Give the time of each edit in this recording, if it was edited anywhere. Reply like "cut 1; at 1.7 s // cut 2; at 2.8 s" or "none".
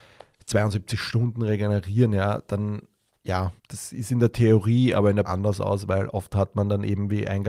cut 1; at 3.6 s // cut 2; at 5.2 s

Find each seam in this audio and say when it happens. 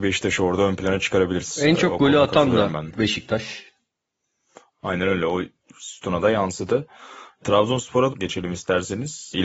cut 1; at 8.1 s

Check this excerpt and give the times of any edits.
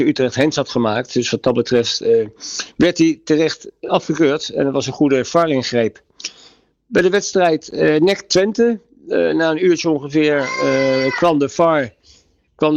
none

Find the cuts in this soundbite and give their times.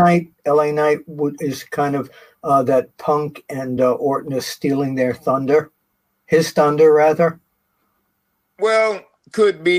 none

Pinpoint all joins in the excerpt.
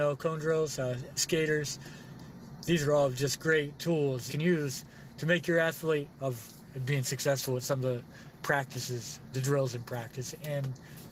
cut 1; at 1.2 s // cut 2; at 3.4 s // cut 3; at 4.3 s // cut 4; at 6.1 s // cut 5; at 9.3 s

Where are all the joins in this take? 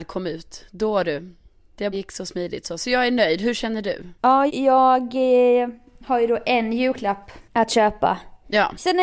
cut 1; at 1.9 s // cut 2; at 4.5 s

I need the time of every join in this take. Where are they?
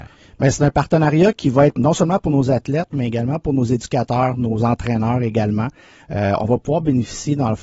cut 1; at 1.8 s

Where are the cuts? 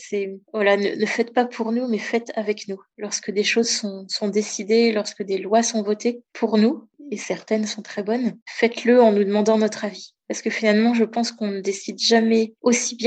none

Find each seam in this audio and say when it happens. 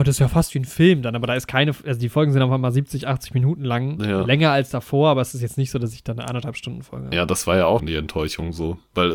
cut 1; at 7.8 s

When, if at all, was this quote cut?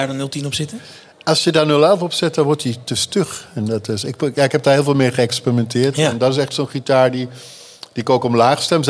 none

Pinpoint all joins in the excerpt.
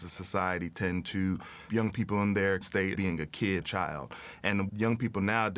cut 1; at 1.7 s // cut 2; at 2.6 s // cut 3; at 2.9 s // cut 4; at 3.6 s // cut 5; at 4.7 s

